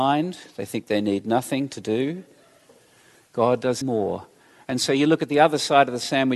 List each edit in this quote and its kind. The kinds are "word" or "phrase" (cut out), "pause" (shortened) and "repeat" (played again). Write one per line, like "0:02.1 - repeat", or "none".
0:03.8 - word